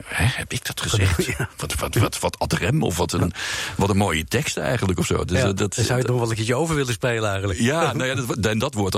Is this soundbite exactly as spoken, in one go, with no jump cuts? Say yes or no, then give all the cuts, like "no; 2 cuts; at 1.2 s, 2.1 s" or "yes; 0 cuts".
yes; 0 cuts